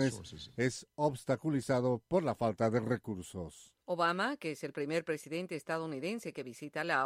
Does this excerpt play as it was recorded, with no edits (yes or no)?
no